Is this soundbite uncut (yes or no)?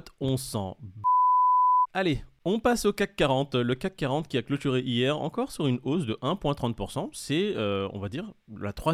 yes